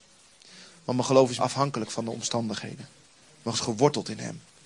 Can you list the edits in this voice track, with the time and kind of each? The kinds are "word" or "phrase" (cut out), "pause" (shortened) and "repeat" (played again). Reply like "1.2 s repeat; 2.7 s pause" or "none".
1.4 s word; 3.5 s word